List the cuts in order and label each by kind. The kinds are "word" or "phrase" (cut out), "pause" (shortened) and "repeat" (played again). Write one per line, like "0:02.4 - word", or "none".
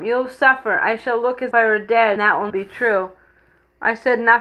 0:01.5 - word
0:02.2 - word
0:02.5 - word